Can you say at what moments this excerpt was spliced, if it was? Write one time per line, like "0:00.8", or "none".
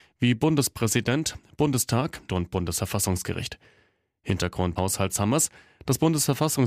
0:02.3
0:04.8